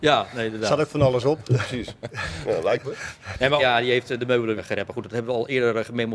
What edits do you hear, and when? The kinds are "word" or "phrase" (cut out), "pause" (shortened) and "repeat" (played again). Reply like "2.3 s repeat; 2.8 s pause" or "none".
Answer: 2.8 s word; 3.6 s word; 4.6 s word

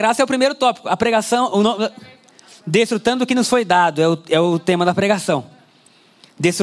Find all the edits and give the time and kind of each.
none

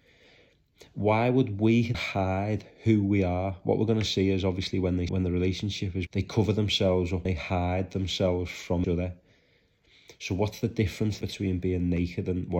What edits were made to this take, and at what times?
1.9 s word; 5.1 s word; 6.1 s word; 7.2 s word; 8.8 s word; 11.2 s word

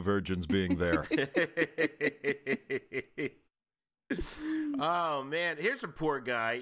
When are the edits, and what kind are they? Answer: none

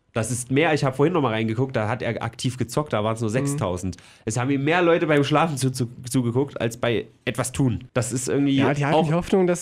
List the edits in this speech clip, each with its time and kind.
7.9 s pause

